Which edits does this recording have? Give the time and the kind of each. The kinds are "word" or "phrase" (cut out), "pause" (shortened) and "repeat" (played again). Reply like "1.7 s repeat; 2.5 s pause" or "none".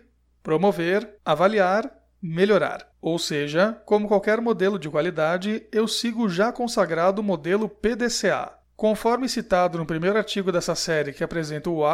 1.2 s pause; 2.9 s pause; 8.6 s pause